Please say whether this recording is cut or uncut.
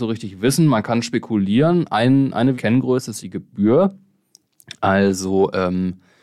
cut